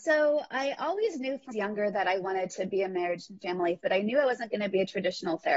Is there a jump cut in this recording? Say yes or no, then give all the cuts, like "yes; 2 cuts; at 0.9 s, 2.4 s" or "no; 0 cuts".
yes; 2 cuts; at 1.5 s, 3.8 s